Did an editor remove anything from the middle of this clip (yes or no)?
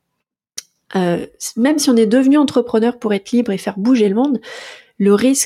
no